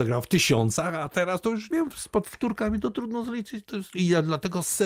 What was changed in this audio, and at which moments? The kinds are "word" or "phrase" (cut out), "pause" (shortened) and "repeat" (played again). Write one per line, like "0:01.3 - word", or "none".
0:01.7 - word

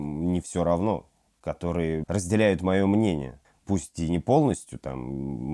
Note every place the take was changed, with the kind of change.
0:02.0 - word
0:03.4 - pause

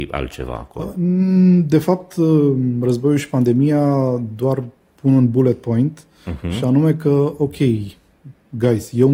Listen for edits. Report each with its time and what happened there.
none

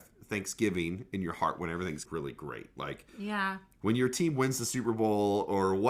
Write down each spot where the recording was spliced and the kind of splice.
0:02.1 - word

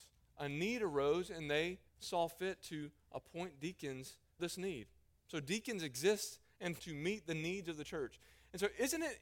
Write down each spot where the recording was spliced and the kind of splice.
0:01.9 - pause
0:04.4 - word
0:06.8 - word

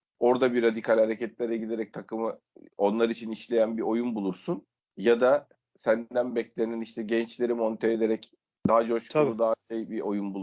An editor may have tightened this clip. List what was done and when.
none

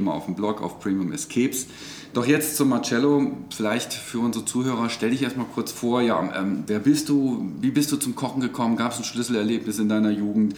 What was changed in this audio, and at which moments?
none

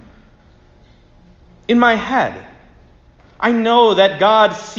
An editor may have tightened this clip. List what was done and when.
none

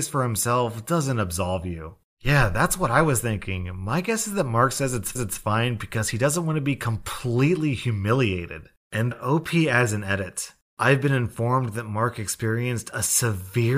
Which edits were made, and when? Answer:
0:05.2 - repeat
0:09.1 - word

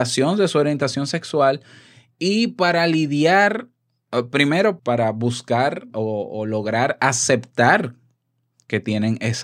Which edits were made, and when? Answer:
0:04.8 - word
0:05.9 - word

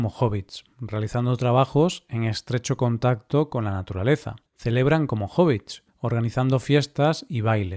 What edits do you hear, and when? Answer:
0:04.5 - pause
0:05.9 - pause

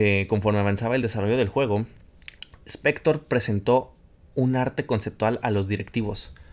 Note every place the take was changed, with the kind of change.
none

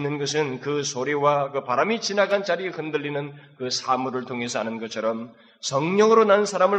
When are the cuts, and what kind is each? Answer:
none

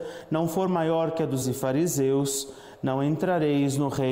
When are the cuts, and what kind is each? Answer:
0:01.4 - word

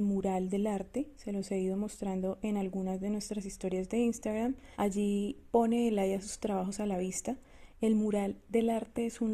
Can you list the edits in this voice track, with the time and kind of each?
0:04.7 - pause

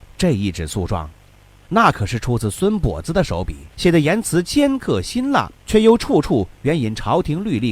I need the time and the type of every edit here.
0:03.7 - pause
0:05.6 - pause

